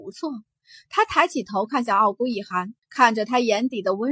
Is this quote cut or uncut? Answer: cut